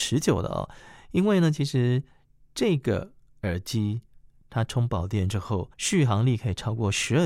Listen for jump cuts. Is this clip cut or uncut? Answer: cut